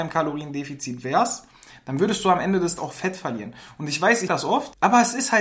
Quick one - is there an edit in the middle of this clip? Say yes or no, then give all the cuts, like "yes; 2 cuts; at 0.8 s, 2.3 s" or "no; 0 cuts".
yes; 2 cuts; at 2.8 s, 4.3 s